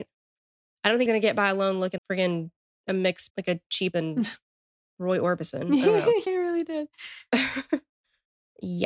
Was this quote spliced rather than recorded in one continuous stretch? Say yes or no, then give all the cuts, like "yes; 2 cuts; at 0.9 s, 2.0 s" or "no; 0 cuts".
yes; 5 cuts; at 1.1 s, 2.0 s, 3.3 s, 3.9 s, 6.3 s